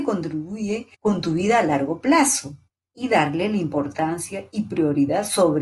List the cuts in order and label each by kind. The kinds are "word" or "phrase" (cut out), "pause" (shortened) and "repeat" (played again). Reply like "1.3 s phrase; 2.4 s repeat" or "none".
0.9 s pause; 2.7 s pause